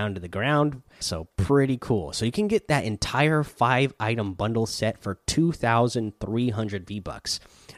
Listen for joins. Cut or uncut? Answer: cut